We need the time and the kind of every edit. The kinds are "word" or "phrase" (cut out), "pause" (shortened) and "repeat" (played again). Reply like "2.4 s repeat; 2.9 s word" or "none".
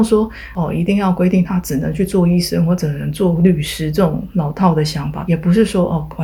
5.3 s phrase